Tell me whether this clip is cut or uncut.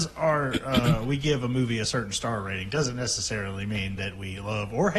uncut